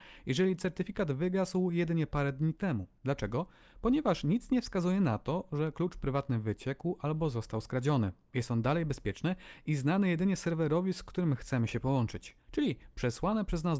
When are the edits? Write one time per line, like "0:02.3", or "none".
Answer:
0:03.0
0:08.2
0:12.4